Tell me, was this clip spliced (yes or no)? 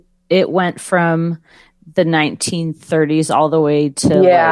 no